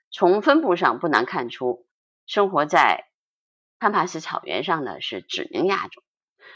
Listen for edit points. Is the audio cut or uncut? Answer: uncut